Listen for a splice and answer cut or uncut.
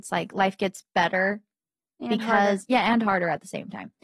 uncut